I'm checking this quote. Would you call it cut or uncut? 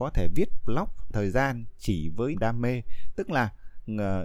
cut